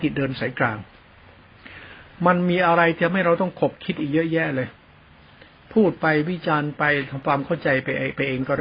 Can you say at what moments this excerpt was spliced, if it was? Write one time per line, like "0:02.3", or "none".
none